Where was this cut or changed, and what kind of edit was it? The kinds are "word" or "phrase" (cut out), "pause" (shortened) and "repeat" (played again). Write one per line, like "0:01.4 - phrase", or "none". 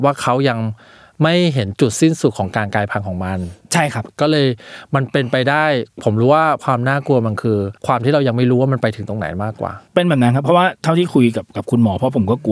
0:03.6 - pause
0:05.9 - pause
0:07.8 - pause
0:09.9 - pause